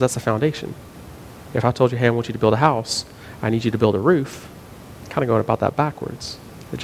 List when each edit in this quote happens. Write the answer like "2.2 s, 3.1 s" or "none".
none